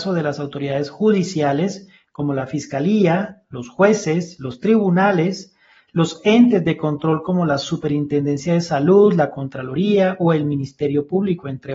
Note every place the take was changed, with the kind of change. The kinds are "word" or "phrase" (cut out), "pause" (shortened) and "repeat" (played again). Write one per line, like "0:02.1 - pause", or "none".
none